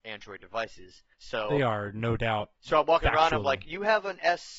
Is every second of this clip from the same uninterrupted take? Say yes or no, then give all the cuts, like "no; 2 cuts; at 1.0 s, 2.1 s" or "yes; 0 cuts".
no; 2 cuts; at 1.1 s, 2.5 s